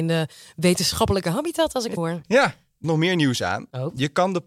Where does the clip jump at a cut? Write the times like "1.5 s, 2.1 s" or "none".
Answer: 1.2 s, 2.0 s, 2.8 s